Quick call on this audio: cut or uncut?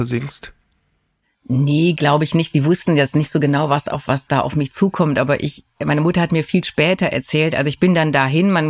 uncut